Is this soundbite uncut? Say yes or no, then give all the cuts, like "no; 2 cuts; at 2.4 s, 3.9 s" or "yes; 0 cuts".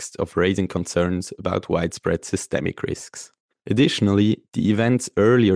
yes; 0 cuts